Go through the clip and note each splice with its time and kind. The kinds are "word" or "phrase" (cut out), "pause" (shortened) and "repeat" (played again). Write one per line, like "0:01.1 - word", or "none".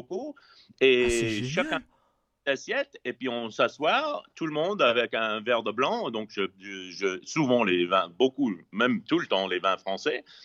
none

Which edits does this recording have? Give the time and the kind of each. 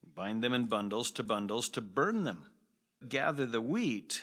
0:01.3 - repeat
0:03.0 - word

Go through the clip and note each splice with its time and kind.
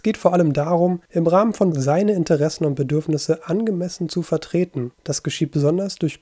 0:01.1 - pause
0:01.7 - word
0:04.9 - pause

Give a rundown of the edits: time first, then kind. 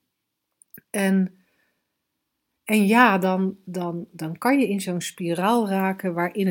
none

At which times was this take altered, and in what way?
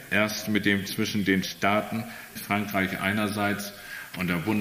0:01.4 - word
0:02.4 - word

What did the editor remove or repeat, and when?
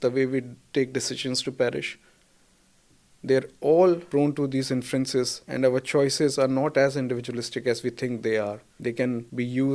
none

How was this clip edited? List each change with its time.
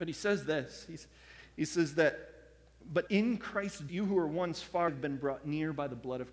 0:03.1 - word
0:03.9 - word
0:04.9 - word

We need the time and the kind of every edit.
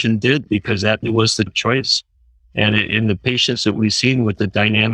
0:01.0 - word
0:01.5 - word

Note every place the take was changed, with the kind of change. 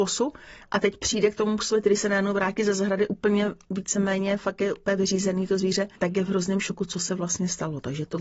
0:06.0 - pause

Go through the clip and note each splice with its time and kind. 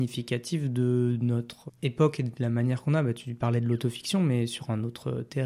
0:01.7 - word

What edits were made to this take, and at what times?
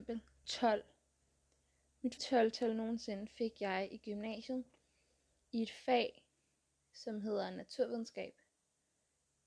0:02.2 - word

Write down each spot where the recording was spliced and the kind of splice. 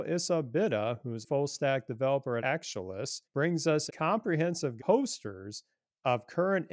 0:01.2 - word
0:02.4 - word
0:03.2 - pause
0:03.9 - word
0:04.8 - phrase

